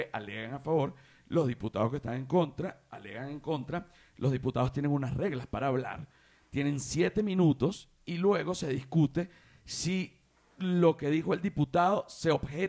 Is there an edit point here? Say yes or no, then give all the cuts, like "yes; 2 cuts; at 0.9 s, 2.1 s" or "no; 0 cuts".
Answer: no; 0 cuts